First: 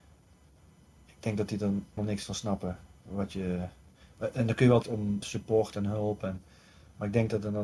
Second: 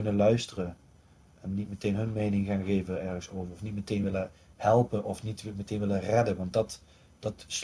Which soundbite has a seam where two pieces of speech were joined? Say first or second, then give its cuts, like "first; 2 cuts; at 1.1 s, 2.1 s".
first; 3 cuts; at 2.0 s, 4.8 s, 5.2 s